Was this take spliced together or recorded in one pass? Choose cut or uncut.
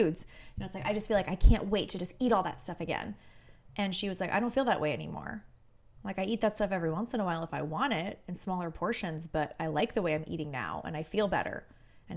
uncut